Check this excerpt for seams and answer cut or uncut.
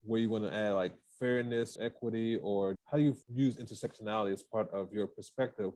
cut